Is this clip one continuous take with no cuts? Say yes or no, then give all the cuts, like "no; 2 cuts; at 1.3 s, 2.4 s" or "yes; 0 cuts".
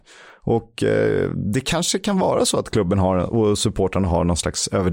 yes; 0 cuts